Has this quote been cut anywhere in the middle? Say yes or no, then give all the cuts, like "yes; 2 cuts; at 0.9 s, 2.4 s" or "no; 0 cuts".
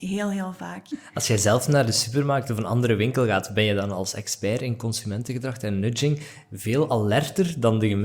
no; 0 cuts